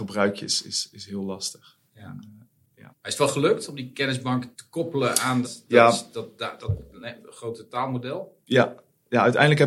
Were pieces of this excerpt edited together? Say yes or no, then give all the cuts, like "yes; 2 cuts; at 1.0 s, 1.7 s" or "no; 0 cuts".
yes; 3 cuts; at 2.9 s, 4.5 s, 5.4 s